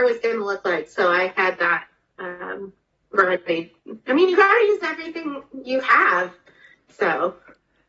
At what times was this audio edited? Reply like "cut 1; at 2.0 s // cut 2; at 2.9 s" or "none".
none